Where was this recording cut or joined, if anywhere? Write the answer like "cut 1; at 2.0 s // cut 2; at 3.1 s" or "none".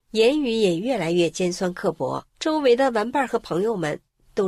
cut 1; at 2.3 s